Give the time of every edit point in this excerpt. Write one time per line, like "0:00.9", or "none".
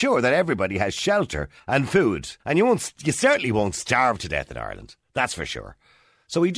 0:01.6
0:02.4

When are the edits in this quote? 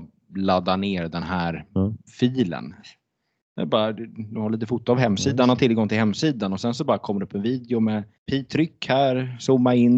0:02.1
0:08.2

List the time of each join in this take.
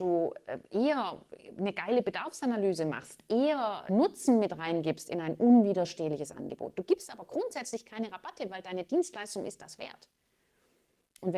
0:03.9

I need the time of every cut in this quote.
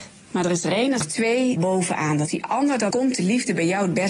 0:01.0
0:01.6
0:02.3
0:02.9

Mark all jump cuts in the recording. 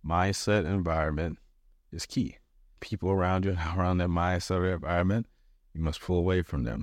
0:02.8

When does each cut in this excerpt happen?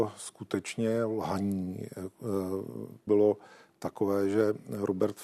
0:03.1

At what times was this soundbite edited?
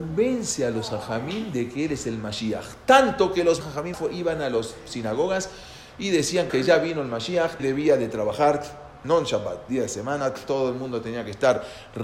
0:03.6
0:03.9
0:06.5
0:07.6

